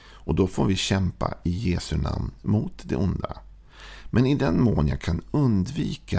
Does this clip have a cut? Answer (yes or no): no